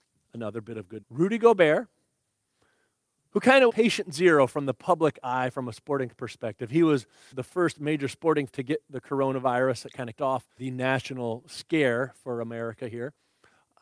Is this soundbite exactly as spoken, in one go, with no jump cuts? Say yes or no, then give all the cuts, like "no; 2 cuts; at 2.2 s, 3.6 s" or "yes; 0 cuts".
no; 6 cuts; at 1.0 s, 3.7 s, 7.3 s, 8.5 s, 10.2 s, 10.6 s